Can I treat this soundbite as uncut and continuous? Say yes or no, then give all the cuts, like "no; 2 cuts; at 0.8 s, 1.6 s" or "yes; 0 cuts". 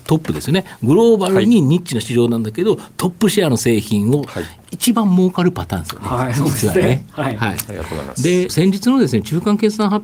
no; 1 cut; at 8.5 s